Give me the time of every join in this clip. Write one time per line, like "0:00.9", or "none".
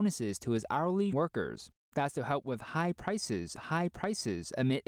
0:01.1
0:03.6

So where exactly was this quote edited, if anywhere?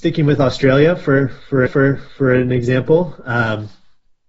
0:01.7

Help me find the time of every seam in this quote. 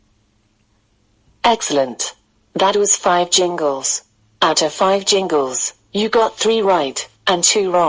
none

